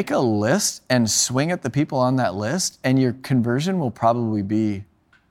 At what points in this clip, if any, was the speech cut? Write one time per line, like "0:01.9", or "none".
none